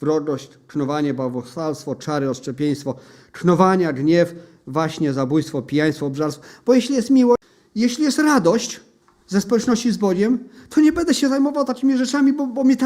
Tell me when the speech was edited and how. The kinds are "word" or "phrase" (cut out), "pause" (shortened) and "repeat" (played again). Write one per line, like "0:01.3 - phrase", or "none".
none